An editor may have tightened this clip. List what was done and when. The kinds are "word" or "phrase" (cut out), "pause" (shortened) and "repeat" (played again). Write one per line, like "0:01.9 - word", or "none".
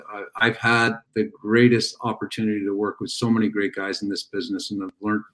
0:01.0 - pause